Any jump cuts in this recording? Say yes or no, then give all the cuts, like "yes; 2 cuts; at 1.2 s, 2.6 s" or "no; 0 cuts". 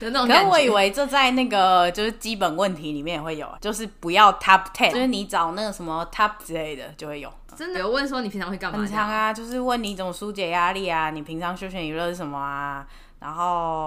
yes; 4 cuts; at 3.6 s, 4.9 s, 6.4 s, 7.7 s